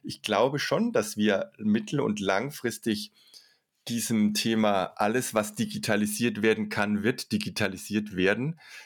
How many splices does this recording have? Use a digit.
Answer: 0